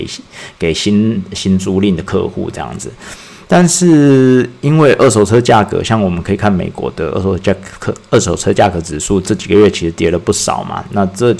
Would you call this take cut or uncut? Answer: uncut